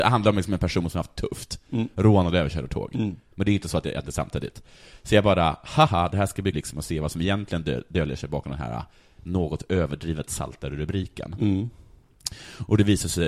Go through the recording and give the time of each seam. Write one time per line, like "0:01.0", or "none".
0:05.9
0:06.5

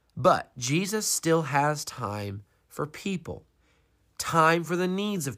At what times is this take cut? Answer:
none

